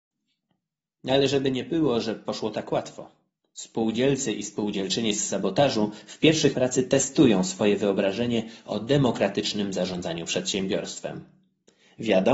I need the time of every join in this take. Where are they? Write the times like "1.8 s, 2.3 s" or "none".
6.5 s